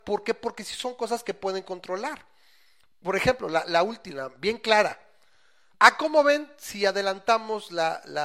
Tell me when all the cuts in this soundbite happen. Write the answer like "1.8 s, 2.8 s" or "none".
none